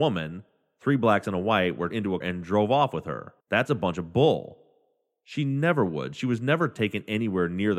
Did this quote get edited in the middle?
yes; 3 cuts; at 1.9 s, 2.2 s, 3.4 s

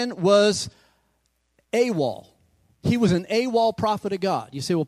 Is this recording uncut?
yes; 0 cuts

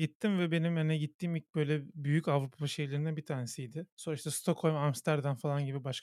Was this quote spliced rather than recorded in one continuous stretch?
yes; 1 cut; at 3.9 s

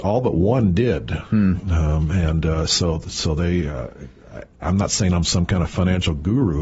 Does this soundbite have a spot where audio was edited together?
no; 0 cuts

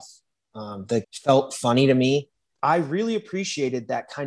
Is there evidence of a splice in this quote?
yes; 2 cuts; at 1.0 s, 2.5 s

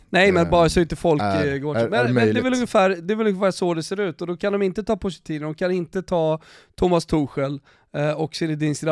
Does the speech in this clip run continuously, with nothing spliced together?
yes; 0 cuts

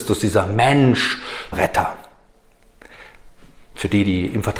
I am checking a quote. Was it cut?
yes; 1 cut; at 1.5 s

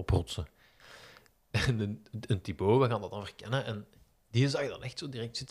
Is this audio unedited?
yes; 0 cuts

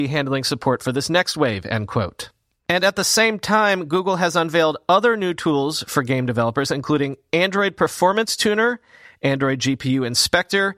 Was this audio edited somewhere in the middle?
no; 0 cuts

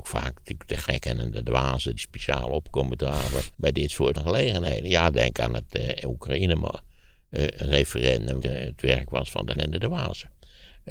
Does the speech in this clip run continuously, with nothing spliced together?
no; 5 cuts; at 2.0 s, 3.5 s, 4.2 s, 8.4 s, 9.6 s

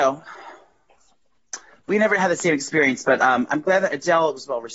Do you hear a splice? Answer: no; 0 cuts

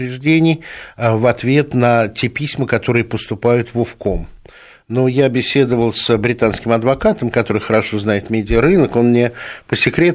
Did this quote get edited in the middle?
no; 0 cuts

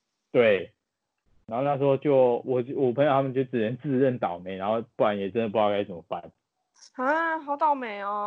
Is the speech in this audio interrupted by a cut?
no; 0 cuts

